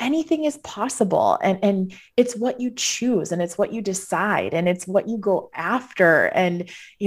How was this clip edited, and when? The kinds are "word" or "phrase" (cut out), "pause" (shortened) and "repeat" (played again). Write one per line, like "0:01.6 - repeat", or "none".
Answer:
none